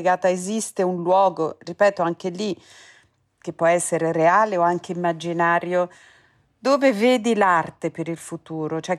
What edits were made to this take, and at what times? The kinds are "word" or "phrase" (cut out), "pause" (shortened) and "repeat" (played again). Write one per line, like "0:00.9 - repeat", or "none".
none